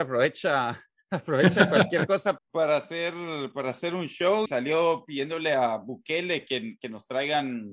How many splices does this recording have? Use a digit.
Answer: 2